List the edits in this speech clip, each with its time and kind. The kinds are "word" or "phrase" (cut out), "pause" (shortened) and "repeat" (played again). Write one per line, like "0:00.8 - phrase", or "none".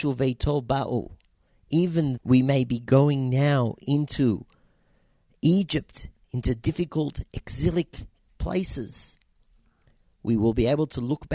0:02.2 - word